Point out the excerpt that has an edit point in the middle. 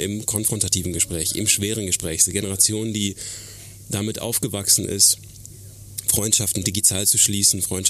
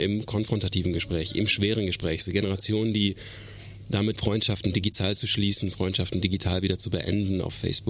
second; 1 cut; at 4.1 s

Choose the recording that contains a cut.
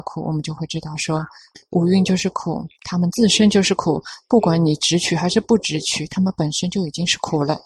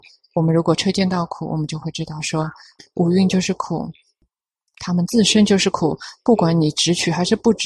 first; 1 cut; at 2.7 s

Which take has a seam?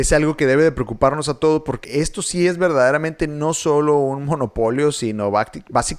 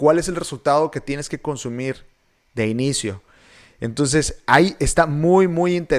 first; 1 cut; at 1.8 s

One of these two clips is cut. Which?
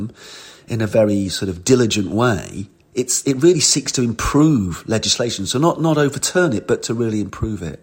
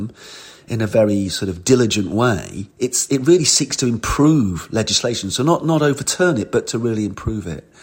second; 1 cut; at 2.7 s

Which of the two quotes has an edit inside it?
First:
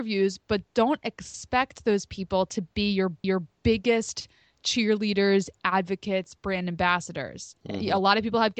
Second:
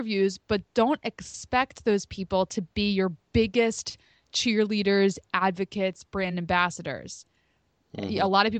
first; 2 cuts; at 3.2 s, 7.6 s

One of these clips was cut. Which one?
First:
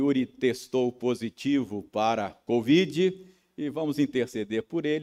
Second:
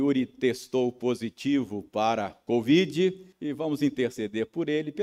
second; 1 cut; at 3.3 s

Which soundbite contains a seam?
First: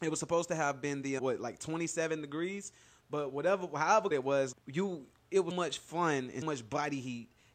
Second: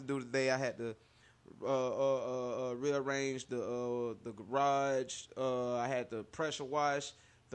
first; 5 cuts; at 1.2 s, 4.1 s, 4.5 s, 5.5 s, 6.4 s

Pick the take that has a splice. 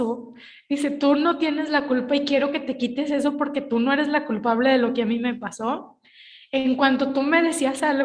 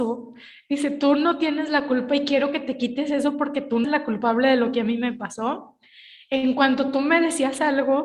second; 1 cut; at 3.8 s

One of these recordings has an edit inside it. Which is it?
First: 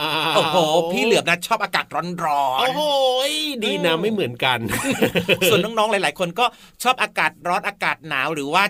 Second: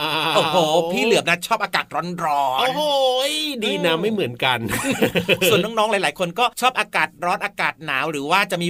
second; 1 cut; at 6.5 s

